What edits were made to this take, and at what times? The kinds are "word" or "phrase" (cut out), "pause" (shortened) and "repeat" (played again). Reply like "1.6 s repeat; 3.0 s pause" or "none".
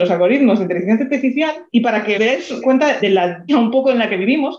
1.7 s pause; 2.1 s word; 2.6 s word; 3.0 s word; 3.5 s word